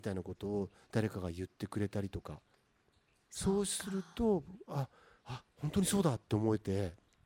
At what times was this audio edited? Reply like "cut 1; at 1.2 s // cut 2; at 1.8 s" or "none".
cut 1; at 5.5 s